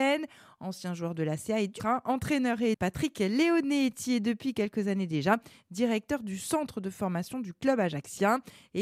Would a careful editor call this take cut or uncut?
cut